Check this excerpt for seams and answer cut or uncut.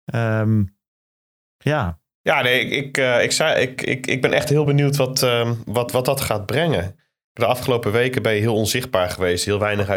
uncut